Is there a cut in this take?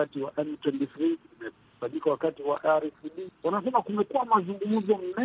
no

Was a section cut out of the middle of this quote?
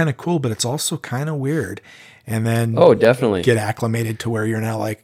no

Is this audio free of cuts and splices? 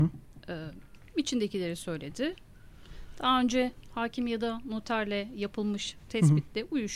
yes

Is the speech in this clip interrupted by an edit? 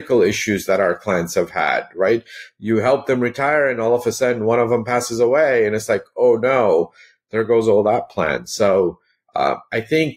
no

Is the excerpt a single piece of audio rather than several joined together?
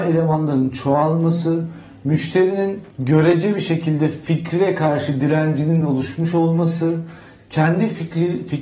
yes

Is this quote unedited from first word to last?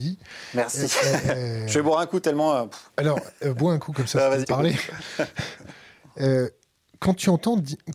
no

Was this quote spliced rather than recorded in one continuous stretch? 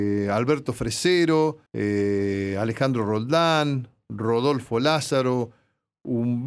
yes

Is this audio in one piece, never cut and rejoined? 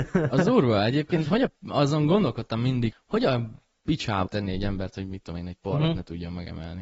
no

